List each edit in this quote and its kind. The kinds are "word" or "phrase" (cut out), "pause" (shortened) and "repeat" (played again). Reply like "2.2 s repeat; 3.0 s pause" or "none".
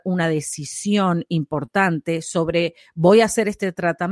none